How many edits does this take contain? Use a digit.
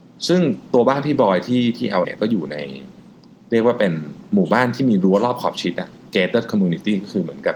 1